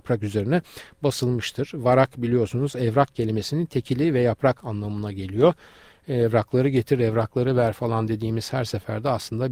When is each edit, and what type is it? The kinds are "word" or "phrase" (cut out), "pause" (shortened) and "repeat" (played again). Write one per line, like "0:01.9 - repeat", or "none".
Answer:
none